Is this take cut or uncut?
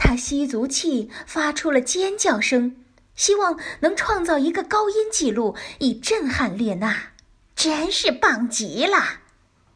cut